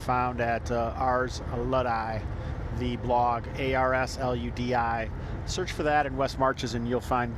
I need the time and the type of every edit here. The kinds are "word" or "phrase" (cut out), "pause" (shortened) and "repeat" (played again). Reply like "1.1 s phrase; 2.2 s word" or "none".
none